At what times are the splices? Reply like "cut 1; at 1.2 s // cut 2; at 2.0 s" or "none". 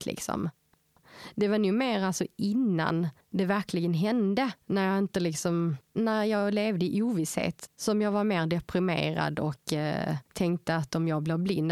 cut 1; at 3.2 s // cut 2; at 4.6 s // cut 3; at 5.9 s // cut 4; at 10.3 s